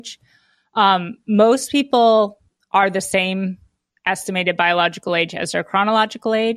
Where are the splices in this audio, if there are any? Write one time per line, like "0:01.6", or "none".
none